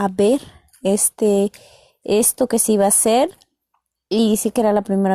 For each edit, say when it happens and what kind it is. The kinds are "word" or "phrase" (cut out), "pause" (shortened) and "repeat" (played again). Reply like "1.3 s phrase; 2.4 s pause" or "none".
none